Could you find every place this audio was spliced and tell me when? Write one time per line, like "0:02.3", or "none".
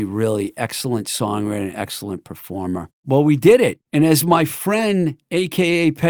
0:02.9
0:03.8